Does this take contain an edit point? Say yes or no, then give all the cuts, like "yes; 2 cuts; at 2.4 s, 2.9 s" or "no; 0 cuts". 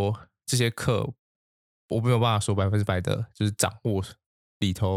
no; 0 cuts